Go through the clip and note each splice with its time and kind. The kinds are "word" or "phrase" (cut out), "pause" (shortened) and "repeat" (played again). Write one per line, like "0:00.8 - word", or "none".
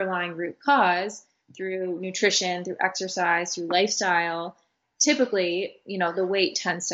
0:04.8 - word